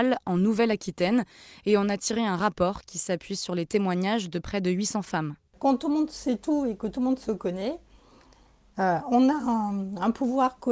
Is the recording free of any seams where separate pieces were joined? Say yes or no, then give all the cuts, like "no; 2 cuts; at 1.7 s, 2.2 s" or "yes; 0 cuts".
yes; 0 cuts